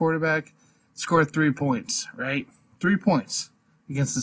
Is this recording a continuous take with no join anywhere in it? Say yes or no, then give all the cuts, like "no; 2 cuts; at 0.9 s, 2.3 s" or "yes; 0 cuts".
yes; 0 cuts